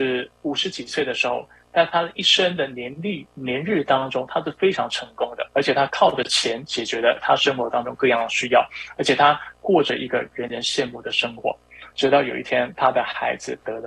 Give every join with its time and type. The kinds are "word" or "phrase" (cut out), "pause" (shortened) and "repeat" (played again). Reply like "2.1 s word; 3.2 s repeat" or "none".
11.9 s pause